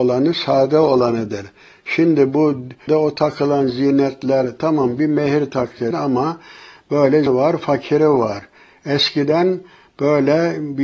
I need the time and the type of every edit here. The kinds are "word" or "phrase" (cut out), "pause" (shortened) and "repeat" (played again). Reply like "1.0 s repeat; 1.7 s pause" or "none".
2.9 s word; 5.9 s word; 7.3 s word